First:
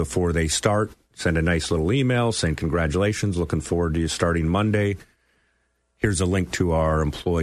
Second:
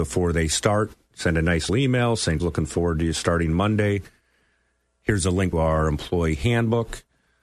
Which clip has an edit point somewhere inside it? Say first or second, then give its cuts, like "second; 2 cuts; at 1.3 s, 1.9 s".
second; 3 cuts; at 1.7 s, 2.4 s, 5.5 s